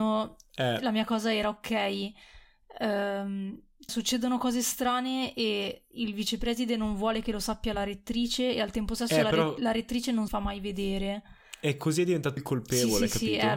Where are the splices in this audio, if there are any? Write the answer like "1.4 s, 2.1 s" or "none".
3.9 s, 10.3 s, 12.4 s